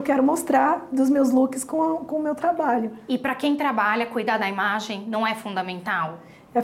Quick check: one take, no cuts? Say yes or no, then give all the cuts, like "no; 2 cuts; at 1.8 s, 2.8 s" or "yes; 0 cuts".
yes; 0 cuts